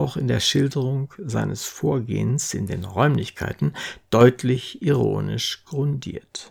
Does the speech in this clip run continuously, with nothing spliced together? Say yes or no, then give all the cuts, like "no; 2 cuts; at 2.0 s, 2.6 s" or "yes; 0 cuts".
yes; 0 cuts